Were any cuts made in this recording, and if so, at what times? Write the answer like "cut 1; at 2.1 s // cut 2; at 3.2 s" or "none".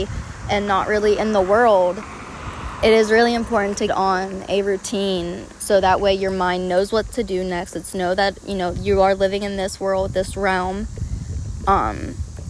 cut 1; at 3.9 s